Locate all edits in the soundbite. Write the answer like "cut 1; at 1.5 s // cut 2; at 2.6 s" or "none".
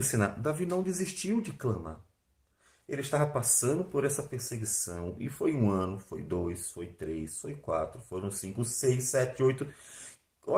none